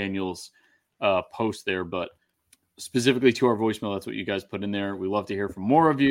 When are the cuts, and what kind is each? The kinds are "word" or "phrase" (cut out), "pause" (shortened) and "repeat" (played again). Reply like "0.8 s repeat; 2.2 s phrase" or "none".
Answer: 2.3 s pause